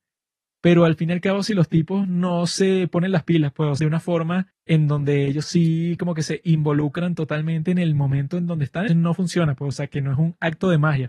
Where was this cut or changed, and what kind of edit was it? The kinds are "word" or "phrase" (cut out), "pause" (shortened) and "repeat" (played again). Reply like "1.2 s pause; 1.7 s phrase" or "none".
3.8 s phrase; 4.5 s pause; 8.9 s word

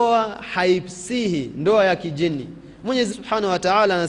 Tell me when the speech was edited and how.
3.1 s word

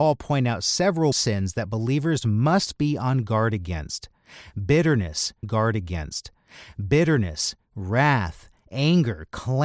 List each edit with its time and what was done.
1.1 s word; 5.4 s repeat

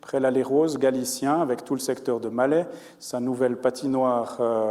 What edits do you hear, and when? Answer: none

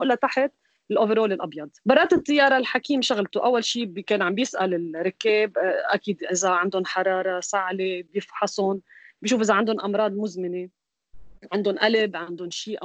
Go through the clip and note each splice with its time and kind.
none

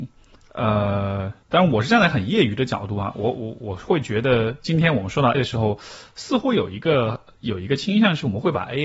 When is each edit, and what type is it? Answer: 1.4 s pause; 5.3 s word

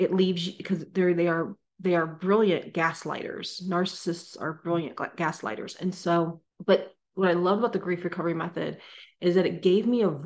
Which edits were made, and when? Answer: 6.5 s pause

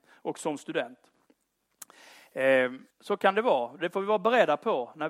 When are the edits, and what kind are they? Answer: 2.9 s pause

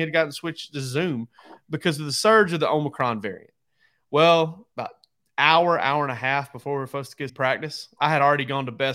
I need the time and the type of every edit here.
4.7 s pause; 7.3 s word

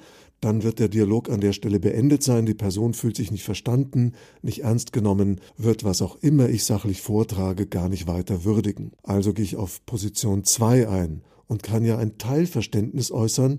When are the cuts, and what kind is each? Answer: 5.5 s pause; 9.0 s pause

